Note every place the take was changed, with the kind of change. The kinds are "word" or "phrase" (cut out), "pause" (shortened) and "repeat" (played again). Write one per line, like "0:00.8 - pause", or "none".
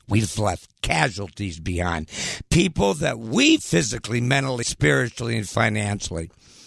0:03.6 - word
0:04.6 - word